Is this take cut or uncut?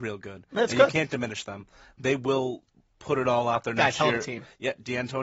uncut